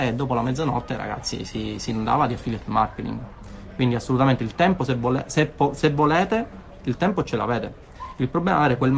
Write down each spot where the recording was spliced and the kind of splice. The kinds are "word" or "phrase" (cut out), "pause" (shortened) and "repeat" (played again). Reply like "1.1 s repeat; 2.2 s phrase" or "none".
none